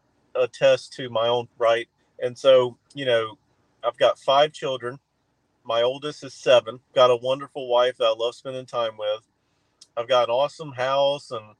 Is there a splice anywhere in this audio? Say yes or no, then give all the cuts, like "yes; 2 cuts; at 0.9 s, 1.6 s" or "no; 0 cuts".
yes; 4 cuts; at 1.5 s, 2.0 s, 2.8 s, 6.9 s